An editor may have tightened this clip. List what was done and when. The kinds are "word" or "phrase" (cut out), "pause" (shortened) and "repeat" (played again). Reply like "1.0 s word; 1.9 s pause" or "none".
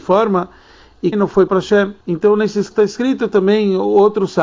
1.1 s phrase; 1.5 s word; 2.0 s pause; 2.7 s word

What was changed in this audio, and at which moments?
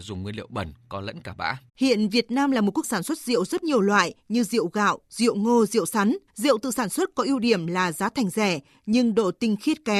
1.7 s pause; 2.8 s word; 3.6 s phrase; 6.3 s pause

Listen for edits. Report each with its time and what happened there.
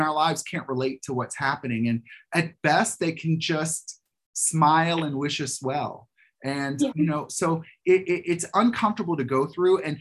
6.9 s word

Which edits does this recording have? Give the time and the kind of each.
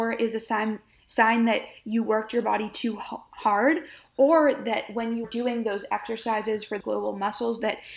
5.2 s word; 6.8 s word

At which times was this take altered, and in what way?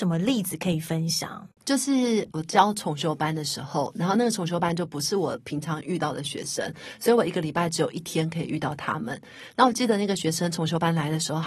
1.5 s pause

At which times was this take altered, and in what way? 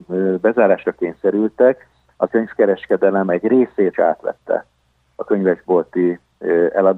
2.3 s word; 3.9 s word

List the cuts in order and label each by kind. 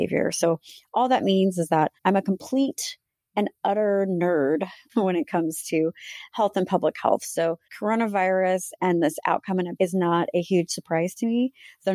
2.0 s pause; 7.7 s pause; 9.8 s word

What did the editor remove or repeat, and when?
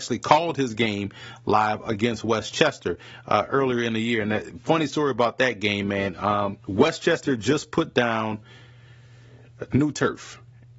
6.6 s pause

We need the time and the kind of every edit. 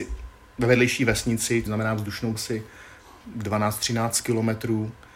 1.7 s word; 2.3 s word

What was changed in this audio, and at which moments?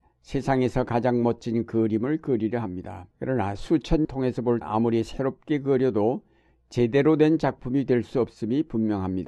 3.1 s pause; 4.0 s phrase; 4.6 s phrase

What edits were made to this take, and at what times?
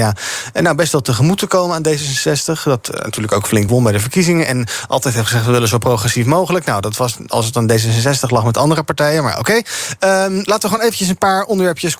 none

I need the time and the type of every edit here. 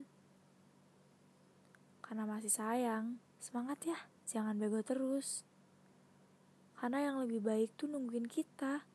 3.2 s pause; 4.2 s pause

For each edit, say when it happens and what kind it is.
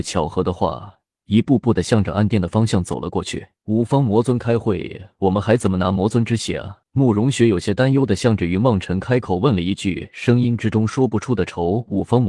3.6 s pause; 6.8 s pause

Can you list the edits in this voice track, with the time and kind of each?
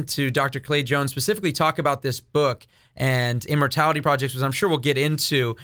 none

